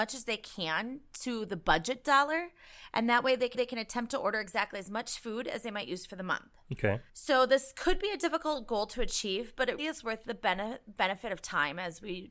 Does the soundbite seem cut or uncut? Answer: cut